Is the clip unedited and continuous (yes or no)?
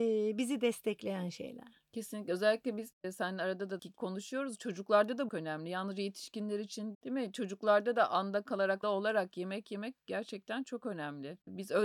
no